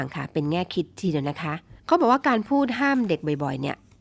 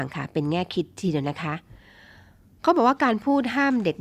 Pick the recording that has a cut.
first; 1 cut; at 1.8 s

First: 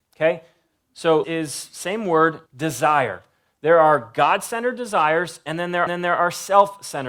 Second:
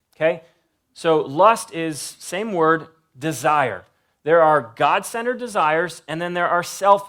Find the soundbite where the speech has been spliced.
first; 3 cuts; at 1.2 s, 2.5 s, 5.9 s

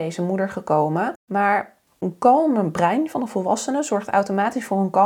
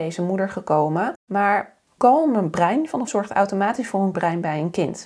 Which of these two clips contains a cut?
second; 3 cuts; at 2.0 s, 3.1 s, 4.1 s

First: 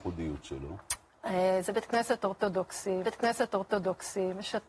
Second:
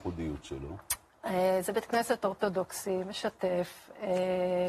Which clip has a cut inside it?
first; 1 cut; at 3.0 s

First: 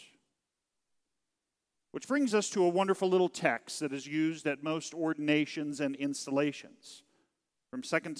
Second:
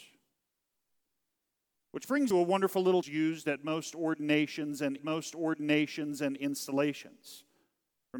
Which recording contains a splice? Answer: second; 3 cuts; at 2.3 s, 3.0 s, 5.0 s

